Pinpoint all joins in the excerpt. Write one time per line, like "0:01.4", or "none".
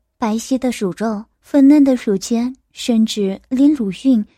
0:01.3